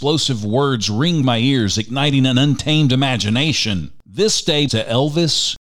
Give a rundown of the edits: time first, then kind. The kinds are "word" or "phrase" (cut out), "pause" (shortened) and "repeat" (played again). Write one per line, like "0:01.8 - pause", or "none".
0:01.2 - word
0:04.7 - word